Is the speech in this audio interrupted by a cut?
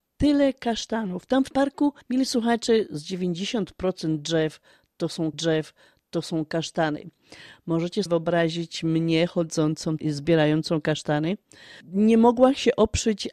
yes; 6 cuts; at 1.5 s, 2.0 s, 5.3 s, 8.1 s, 10.0 s, 11.8 s

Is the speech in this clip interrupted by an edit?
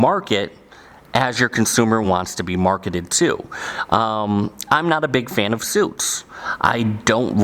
no; 0 cuts

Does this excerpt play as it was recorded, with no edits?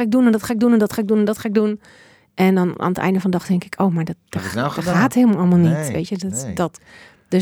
yes; 0 cuts

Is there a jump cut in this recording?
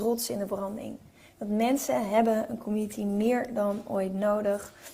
no; 0 cuts

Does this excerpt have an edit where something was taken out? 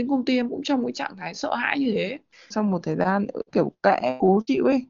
no; 0 cuts

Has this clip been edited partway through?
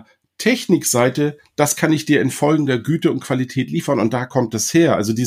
no; 0 cuts

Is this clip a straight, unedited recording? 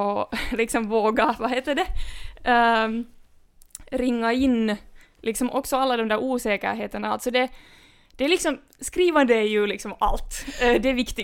yes; 0 cuts

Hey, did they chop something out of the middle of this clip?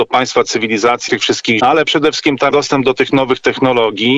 yes; 3 cuts; at 1.1 s, 1.6 s, 2.5 s

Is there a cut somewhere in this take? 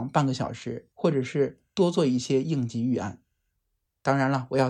yes; 1 cut; at 0.9 s

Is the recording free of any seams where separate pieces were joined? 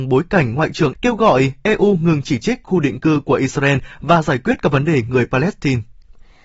no; 2 cuts; at 0.9 s, 2.6 s

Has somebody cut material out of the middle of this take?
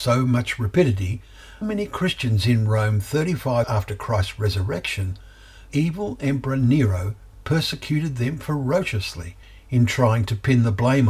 yes; 4 cuts; at 1.6 s, 3.6 s, 5.7 s, 9.4 s

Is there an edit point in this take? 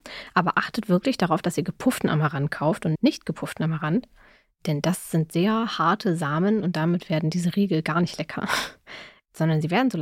yes; 1 cut; at 2.9 s

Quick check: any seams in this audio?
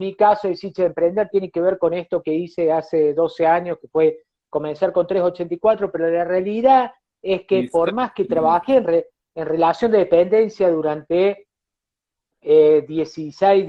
no; 0 cuts

